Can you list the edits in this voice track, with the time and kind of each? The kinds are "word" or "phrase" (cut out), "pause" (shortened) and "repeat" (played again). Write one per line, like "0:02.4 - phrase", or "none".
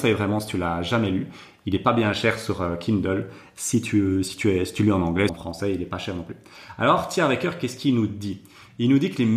0:05.3 - word